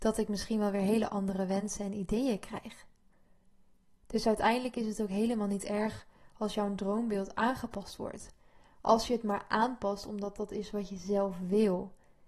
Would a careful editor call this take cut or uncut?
uncut